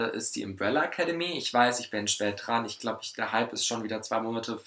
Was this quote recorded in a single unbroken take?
yes; 0 cuts

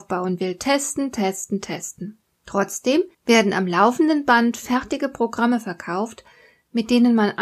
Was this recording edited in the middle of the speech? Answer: yes; 1 cut; at 3.1 s

